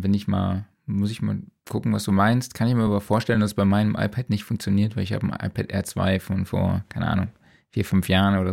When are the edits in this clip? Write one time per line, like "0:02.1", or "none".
none